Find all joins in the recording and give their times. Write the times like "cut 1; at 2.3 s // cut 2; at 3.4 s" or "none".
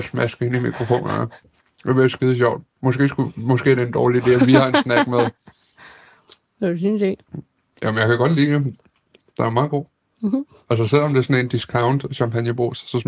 none